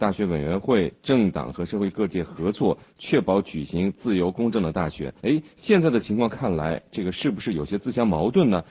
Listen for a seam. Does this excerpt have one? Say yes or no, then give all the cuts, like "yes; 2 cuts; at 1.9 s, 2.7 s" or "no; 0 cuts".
yes; 1 cut; at 5.2 s